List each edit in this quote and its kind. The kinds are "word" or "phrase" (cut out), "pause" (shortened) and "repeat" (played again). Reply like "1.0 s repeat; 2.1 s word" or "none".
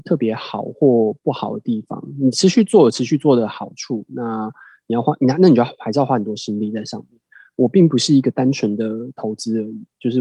1.2 s pause